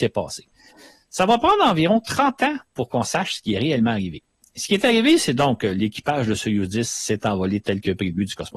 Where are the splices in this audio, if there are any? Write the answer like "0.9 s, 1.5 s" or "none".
none

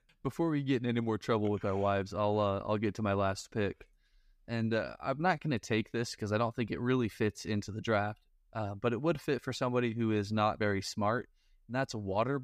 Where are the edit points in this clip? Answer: none

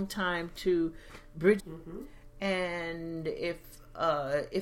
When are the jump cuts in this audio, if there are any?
1.6 s

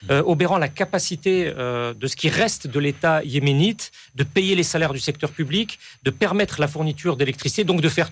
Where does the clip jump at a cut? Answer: none

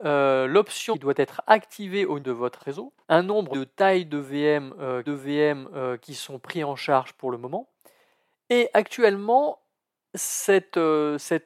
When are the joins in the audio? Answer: 0.9 s, 2.2 s, 2.6 s, 3.0 s, 3.5 s, 5.1 s

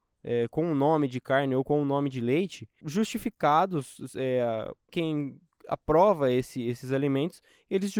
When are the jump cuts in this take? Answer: 2.8 s, 4.9 s

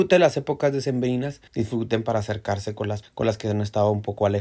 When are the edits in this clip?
1.5 s, 3.0 s

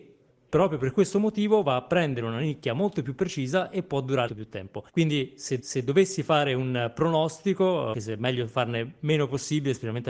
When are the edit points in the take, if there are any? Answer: 4.3 s, 4.9 s, 5.6 s, 7.9 s

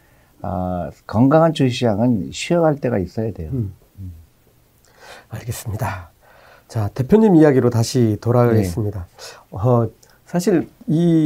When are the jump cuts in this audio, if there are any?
none

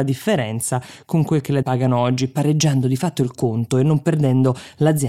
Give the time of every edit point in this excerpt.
1.6 s

